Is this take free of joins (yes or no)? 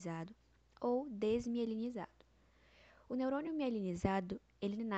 yes